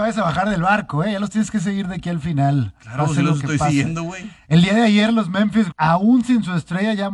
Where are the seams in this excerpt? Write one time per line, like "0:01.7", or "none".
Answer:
0:05.7